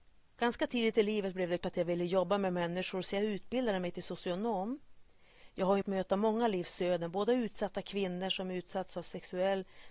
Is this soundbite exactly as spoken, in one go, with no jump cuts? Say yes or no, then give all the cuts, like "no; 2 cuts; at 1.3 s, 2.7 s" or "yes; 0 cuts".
no; 2 cuts; at 1.6 s, 5.8 s